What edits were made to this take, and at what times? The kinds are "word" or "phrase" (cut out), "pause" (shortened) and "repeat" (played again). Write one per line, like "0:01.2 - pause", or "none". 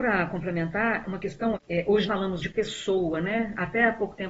0:01.0 - word
0:01.5 - word
0:02.1 - word
0:02.4 - word